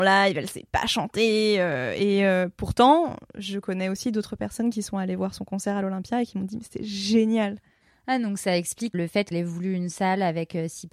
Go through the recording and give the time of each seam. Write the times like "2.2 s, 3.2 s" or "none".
8.9 s, 9.3 s